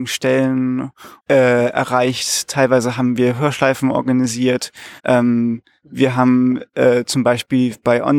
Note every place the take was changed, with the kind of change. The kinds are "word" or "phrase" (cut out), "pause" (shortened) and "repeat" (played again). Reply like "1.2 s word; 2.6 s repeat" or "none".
1.2 s pause; 5.0 s pause

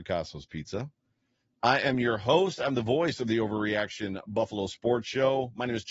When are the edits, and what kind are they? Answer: none

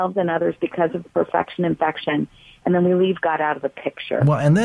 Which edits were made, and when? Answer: none

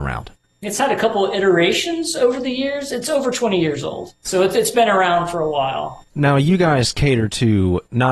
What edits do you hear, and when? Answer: none

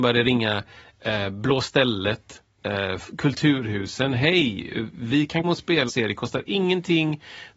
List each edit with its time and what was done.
5.4 s word; 5.9 s word

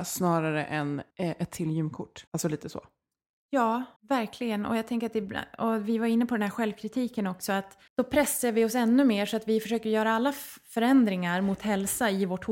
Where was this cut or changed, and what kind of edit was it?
1.1 s pause; 2.3 s pause; 4.0 s pause; 7.9 s pause

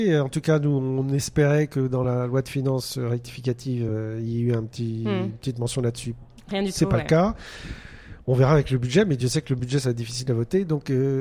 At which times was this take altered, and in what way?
none

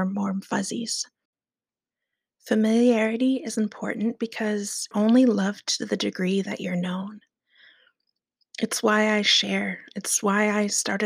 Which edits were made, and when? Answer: 4.9 s word

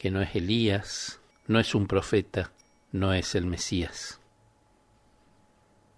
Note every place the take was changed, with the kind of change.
none

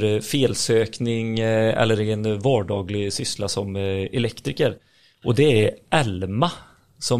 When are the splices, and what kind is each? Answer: none

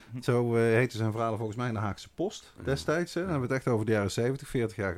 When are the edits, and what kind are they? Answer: none

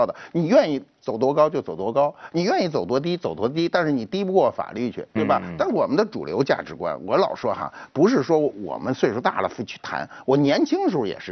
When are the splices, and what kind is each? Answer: 5.2 s word

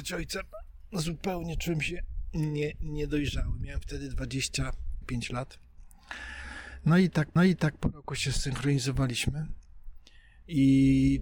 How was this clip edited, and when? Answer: 5.0 s word; 7.4 s repeat

